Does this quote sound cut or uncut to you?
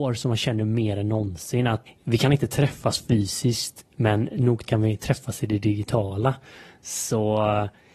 cut